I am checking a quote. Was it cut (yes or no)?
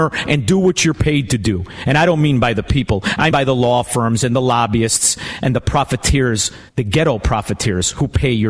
yes